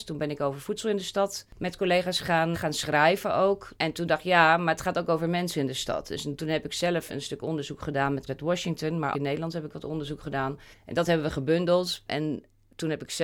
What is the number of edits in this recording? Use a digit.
6